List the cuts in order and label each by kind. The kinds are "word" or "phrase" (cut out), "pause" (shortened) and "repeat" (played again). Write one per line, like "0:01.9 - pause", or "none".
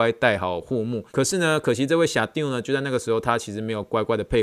0:01.1 - pause